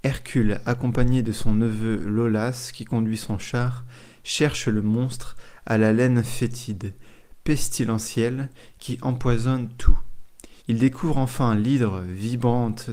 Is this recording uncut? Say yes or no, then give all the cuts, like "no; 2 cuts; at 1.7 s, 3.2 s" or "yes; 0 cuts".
no; 1 cut; at 10.6 s